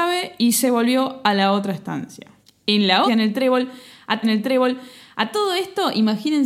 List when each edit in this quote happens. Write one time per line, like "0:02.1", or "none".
0:02.4
0:03.1
0:04.2